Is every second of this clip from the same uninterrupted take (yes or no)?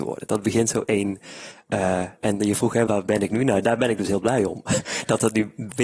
no